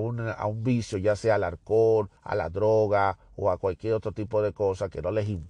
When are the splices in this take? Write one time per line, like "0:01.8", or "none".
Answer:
0:02.2